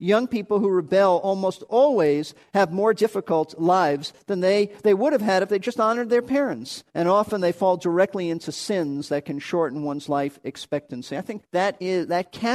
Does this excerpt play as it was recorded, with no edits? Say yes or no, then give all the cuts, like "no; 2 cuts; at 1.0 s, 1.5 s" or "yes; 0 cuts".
no; 2 cuts; at 6.9 s, 11.4 s